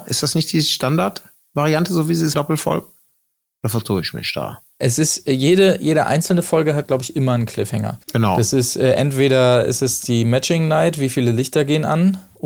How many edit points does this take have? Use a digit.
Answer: 2